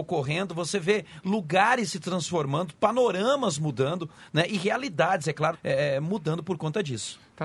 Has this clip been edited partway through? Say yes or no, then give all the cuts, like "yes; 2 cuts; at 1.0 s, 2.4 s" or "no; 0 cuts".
yes; 1 cut; at 5.5 s